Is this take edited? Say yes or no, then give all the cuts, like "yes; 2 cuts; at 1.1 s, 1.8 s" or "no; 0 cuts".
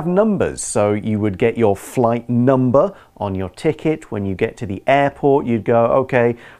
no; 0 cuts